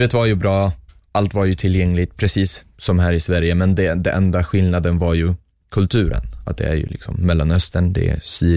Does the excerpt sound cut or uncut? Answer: uncut